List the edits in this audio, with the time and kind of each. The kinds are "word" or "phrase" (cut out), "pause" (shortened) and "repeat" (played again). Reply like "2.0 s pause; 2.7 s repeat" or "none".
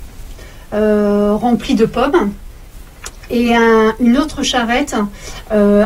none